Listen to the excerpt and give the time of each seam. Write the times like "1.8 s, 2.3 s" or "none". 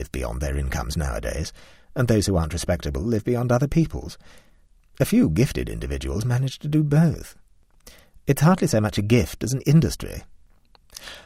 none